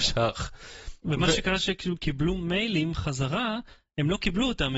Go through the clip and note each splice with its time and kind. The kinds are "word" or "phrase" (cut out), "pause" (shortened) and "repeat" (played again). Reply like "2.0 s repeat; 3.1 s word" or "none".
2.0 s word